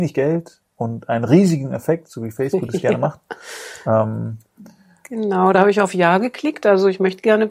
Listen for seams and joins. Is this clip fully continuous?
yes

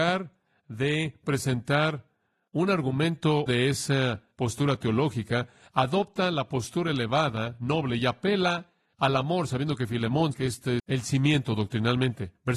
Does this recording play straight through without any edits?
no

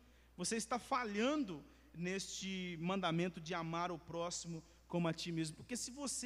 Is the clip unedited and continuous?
yes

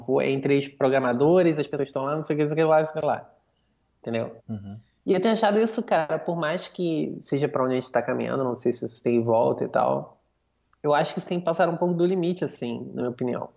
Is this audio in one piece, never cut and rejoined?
yes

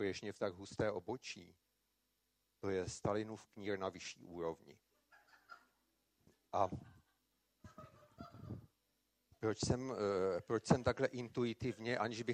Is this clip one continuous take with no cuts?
yes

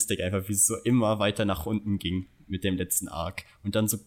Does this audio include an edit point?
no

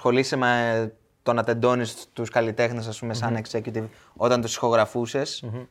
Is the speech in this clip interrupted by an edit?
no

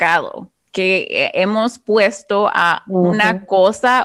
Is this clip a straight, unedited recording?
yes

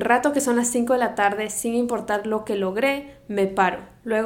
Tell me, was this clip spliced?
no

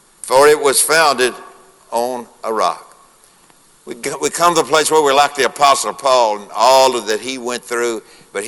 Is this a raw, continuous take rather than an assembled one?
yes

